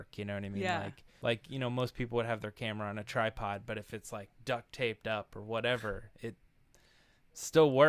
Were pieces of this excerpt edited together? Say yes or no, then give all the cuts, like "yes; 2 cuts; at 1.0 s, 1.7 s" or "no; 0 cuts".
yes; 1 cut; at 1.2 s